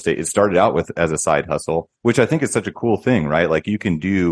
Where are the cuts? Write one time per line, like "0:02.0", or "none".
0:02.0